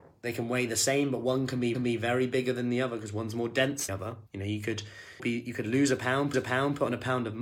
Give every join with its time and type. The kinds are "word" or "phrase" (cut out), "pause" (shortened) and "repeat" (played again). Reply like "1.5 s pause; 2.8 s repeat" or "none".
1.7 s repeat; 3.9 s word; 4.3 s pause; 5.2 s phrase; 6.3 s repeat